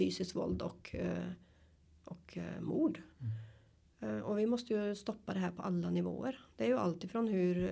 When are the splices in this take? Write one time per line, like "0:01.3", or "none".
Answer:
none